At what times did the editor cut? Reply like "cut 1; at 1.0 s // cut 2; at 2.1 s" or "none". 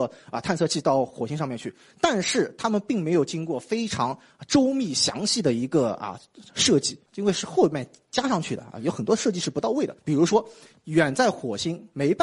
cut 1; at 7.1 s // cut 2; at 10.0 s